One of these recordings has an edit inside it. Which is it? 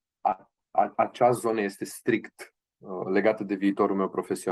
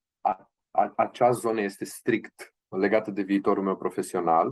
second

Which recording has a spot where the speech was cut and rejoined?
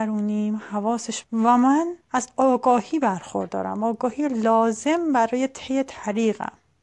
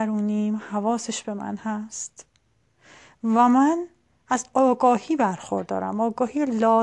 first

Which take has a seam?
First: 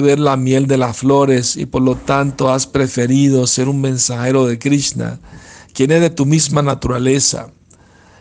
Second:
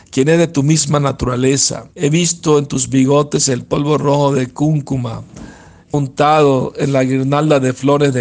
second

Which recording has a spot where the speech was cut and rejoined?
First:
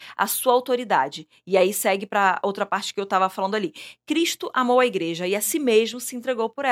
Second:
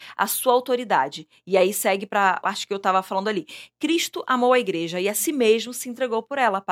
second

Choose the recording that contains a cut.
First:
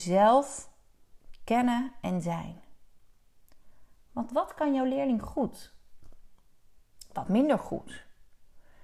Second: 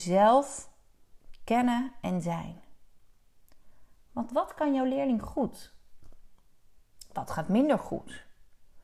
first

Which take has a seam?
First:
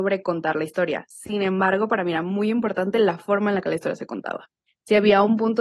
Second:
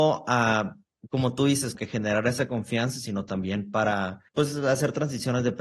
second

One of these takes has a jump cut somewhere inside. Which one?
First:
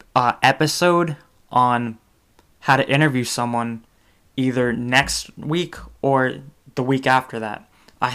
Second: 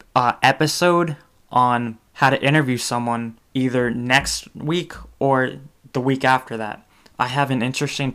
second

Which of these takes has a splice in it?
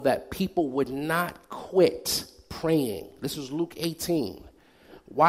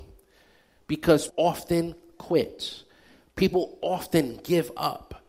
second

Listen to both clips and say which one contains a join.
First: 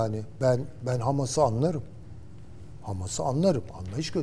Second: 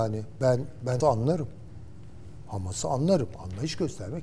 second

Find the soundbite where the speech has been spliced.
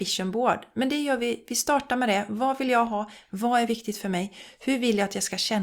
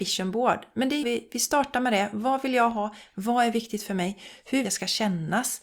second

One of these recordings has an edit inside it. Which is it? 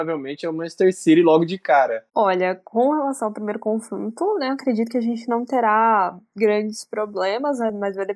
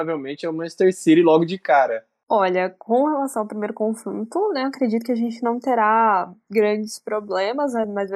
first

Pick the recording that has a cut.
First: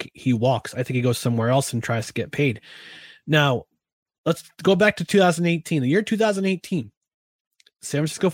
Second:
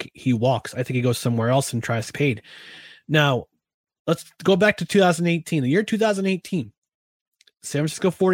second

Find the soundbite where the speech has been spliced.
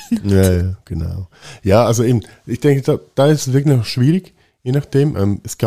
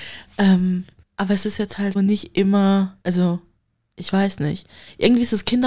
second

